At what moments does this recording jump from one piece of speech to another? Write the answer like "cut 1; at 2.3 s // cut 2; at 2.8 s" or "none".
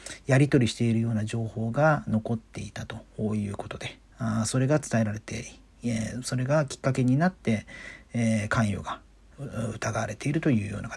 cut 1; at 4.1 s